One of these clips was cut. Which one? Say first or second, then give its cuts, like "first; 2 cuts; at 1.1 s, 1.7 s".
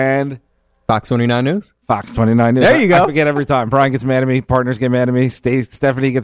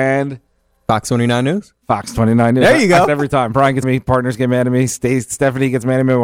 second; 2 cuts; at 3.1 s, 3.8 s